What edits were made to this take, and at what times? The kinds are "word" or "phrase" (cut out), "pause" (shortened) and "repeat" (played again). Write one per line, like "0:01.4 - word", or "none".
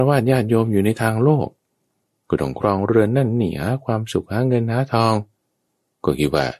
none